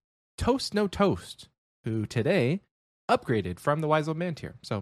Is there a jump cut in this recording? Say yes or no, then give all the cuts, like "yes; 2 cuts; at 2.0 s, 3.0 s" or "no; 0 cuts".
no; 0 cuts